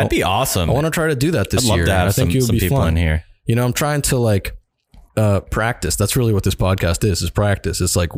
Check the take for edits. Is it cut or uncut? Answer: cut